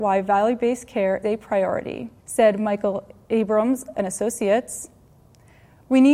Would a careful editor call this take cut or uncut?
cut